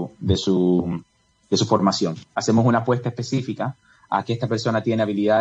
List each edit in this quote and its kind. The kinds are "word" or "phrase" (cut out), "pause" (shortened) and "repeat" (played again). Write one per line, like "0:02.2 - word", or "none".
none

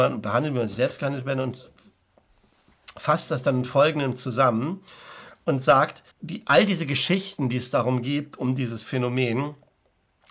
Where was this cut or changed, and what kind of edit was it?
0:06.1 - pause

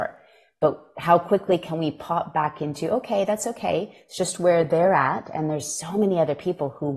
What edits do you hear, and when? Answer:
none

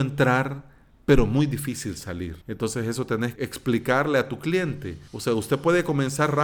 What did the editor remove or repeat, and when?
0:02.4 - pause
0:03.4 - word
0:05.1 - pause

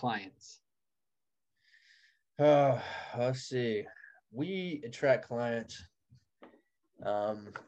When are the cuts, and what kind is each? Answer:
none

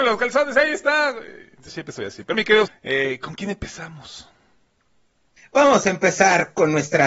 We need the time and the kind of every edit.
0:01.7 - word
0:02.3 - word
0:02.7 - word

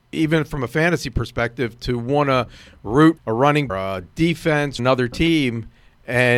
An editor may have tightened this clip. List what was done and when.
0:03.2 - word
0:03.7 - phrase
0:04.8 - word

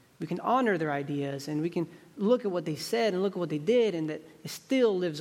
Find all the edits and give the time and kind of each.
none

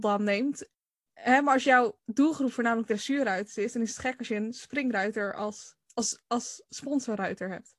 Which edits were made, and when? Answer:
0:05.8 - pause

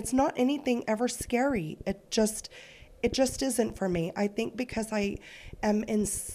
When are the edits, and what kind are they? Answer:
none

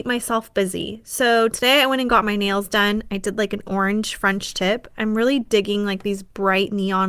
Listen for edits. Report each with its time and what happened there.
none

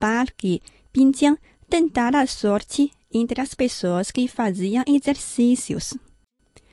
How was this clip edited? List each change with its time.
none

